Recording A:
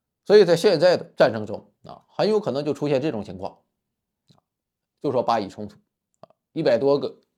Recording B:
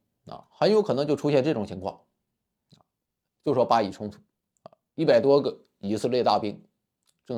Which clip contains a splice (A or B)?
A